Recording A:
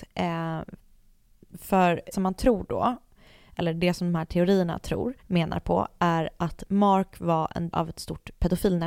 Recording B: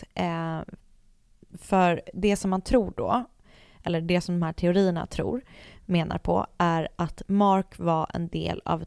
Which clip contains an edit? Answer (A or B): A